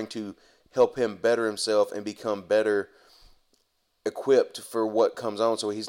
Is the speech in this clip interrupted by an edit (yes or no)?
no